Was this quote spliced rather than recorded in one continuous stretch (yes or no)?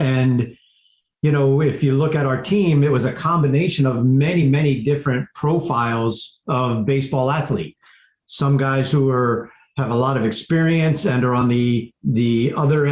no